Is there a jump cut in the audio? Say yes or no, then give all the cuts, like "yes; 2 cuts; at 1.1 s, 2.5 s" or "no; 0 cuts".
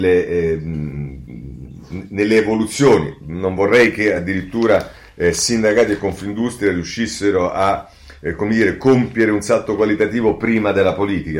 no; 0 cuts